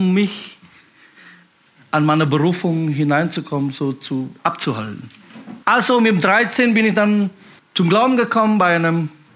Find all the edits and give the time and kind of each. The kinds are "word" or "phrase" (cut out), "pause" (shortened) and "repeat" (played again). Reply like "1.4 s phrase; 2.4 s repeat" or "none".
5.6 s pause; 7.6 s pause